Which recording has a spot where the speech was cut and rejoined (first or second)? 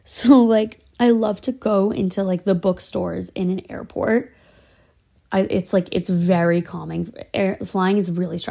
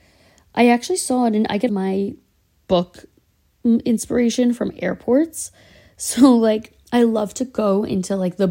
second